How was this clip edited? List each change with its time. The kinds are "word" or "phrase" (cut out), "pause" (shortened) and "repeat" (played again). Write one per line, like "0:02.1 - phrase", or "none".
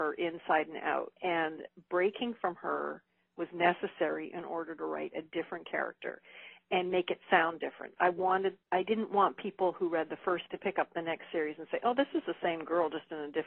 0:01.2 - pause
0:08.6 - pause
0:10.5 - word

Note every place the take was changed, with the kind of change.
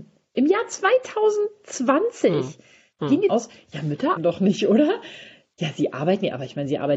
0:03.3 - word
0:04.2 - word

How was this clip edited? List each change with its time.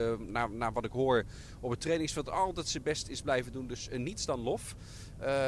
none

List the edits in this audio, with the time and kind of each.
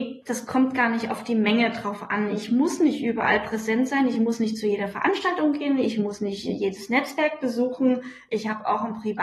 none

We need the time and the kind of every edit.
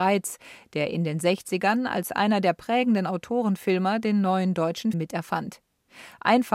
0:04.9 - word

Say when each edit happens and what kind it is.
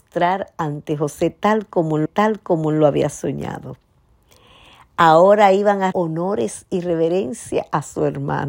0:02.1 - repeat
0:05.9 - word

